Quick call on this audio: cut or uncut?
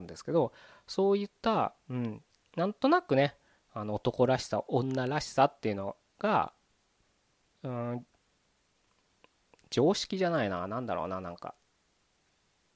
cut